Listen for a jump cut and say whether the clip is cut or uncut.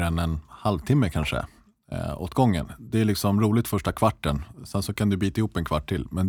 uncut